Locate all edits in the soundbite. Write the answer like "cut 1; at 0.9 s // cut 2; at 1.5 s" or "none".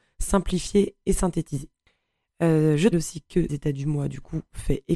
cut 1; at 2.9 s // cut 2; at 3.5 s